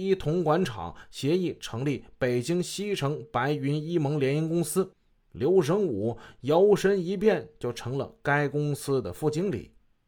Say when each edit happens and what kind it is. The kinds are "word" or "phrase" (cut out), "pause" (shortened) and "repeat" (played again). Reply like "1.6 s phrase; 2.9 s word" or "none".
none